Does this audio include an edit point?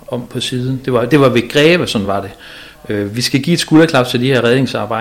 no; 0 cuts

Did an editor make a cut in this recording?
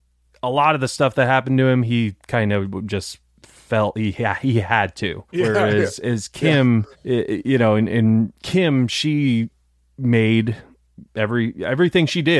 yes; 4 cuts; at 5.3 s, 6.9 s, 8.4 s, 11.1 s

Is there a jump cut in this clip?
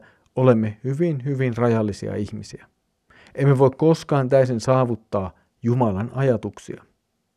no; 0 cuts

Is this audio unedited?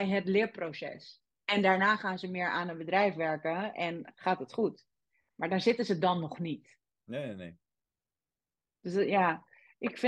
yes; 0 cuts

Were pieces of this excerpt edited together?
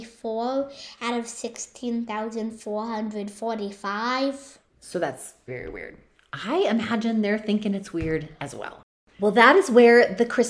yes; 1 cut; at 5.5 s

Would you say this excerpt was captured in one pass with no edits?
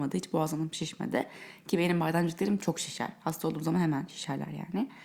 yes; 0 cuts

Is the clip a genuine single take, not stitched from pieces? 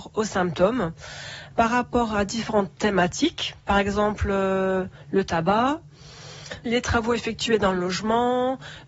no; 1 cut; at 6.7 s

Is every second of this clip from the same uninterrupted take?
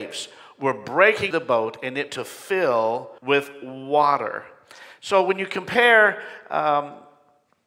no; 3 cuts; at 1.3 s, 2.1 s, 3.2 s

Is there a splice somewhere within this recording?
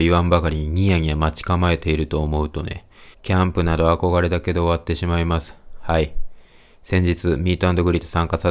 yes; 1 cut; at 3.1 s

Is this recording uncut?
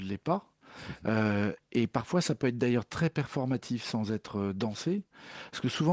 yes; 0 cuts

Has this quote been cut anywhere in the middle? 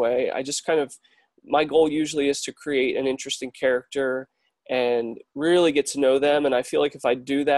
no; 0 cuts

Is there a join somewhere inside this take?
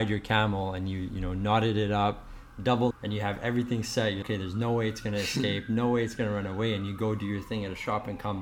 yes; 2 cuts; at 2.9 s, 4.2 s

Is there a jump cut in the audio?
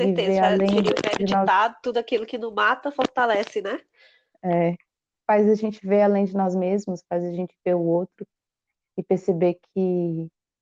no; 0 cuts

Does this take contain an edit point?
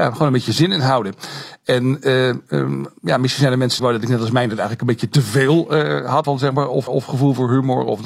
yes; 3 cuts; at 3.8 s, 6.2 s, 6.9 s

